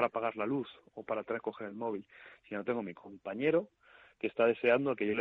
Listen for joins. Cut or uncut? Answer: uncut